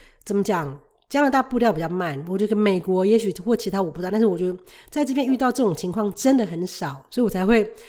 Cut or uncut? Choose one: uncut